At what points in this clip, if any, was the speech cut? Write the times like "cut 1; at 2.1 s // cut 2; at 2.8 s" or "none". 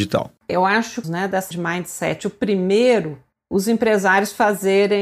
cut 1; at 1.0 s // cut 2; at 1.5 s